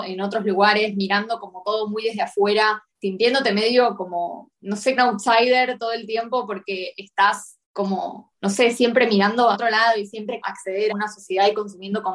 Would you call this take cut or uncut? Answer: cut